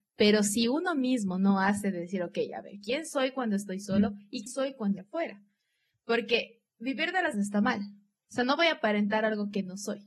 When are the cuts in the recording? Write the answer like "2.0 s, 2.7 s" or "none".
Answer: 4.5 s, 5.0 s, 6.7 s, 7.3 s